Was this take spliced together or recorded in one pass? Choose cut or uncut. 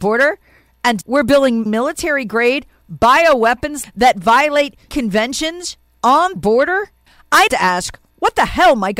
cut